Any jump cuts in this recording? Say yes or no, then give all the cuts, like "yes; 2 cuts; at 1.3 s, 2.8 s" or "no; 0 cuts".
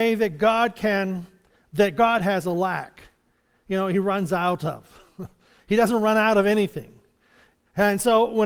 no; 0 cuts